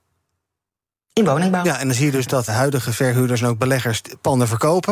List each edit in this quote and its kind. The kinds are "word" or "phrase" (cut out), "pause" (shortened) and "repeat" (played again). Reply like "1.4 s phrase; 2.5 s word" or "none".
2.5 s word